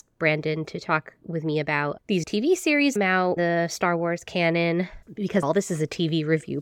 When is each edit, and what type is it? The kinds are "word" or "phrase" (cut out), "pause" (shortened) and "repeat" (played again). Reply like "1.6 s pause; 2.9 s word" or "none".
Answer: 2.2 s word; 3.0 s phrase; 3.4 s word; 5.4 s word